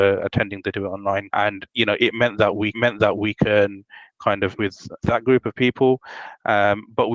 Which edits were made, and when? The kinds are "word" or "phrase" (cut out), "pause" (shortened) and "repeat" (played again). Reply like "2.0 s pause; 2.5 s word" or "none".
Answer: 1.3 s word; 2.7 s repeat; 4.6 s word; 5.0 s word